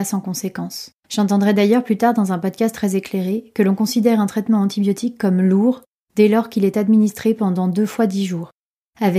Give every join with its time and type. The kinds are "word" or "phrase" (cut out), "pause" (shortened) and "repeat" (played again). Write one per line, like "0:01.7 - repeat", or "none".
0:01.0 - pause